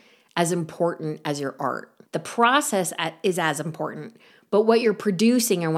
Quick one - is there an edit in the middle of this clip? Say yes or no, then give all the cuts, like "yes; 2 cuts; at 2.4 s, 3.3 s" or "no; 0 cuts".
yes; 1 cut; at 2.1 s